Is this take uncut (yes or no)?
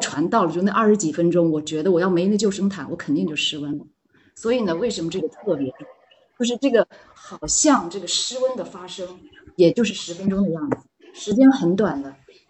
yes